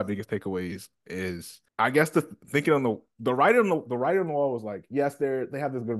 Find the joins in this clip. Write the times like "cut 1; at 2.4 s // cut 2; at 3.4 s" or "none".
cut 1; at 1.7 s

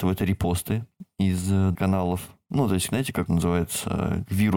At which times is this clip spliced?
cut 1; at 1.7 s // cut 2; at 3.3 s

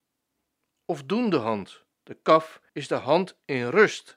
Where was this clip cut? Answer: cut 1; at 1.9 s // cut 2; at 2.7 s

